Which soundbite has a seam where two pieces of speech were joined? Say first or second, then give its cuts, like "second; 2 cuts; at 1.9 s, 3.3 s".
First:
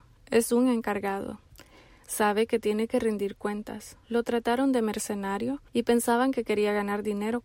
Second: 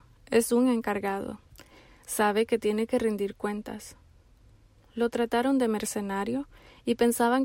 first; 2 cuts; at 4.0 s, 5.7 s